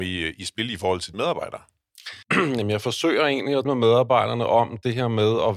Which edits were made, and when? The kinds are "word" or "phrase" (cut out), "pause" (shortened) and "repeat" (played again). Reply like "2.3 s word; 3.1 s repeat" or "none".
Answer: 1.1 s word; 2.2 s pause; 3.6 s word